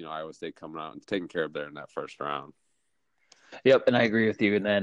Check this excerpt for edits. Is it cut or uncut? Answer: cut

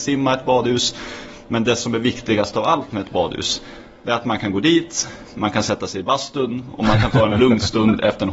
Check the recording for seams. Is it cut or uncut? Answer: uncut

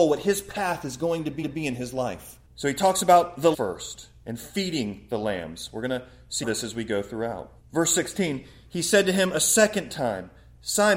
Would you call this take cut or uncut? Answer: cut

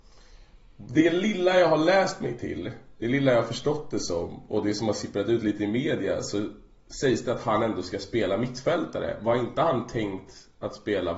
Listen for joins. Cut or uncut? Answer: uncut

